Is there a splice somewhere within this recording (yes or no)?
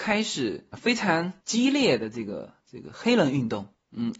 yes